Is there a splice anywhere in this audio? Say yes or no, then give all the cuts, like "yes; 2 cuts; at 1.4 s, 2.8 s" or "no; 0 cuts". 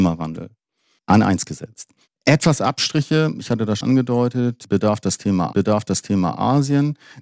yes; 2 cuts; at 3.8 s, 5.5 s